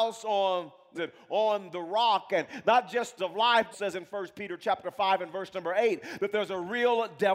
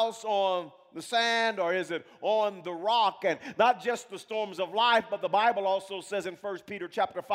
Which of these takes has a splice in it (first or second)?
first